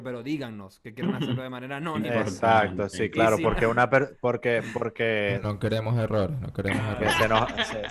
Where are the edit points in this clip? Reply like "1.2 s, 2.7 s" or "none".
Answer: none